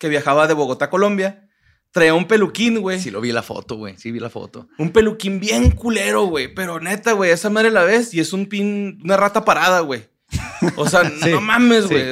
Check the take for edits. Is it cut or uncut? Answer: uncut